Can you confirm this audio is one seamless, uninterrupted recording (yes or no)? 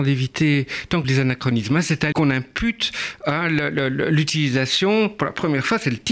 no